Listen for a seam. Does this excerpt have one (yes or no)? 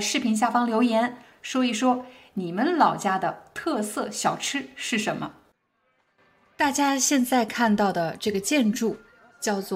no